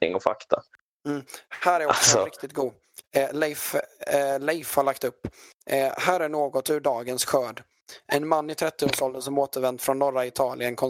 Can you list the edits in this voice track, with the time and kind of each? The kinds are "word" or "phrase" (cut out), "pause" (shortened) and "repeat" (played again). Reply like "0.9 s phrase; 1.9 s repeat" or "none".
none